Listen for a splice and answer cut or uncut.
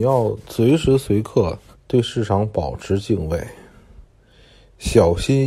cut